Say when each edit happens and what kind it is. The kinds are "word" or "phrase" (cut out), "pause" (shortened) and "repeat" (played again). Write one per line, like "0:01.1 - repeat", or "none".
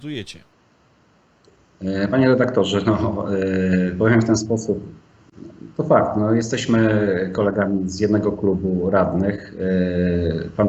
none